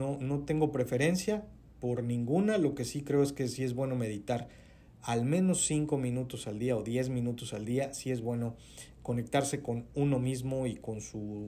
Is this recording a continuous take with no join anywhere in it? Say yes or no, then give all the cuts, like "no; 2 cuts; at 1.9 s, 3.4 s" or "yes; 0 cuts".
yes; 0 cuts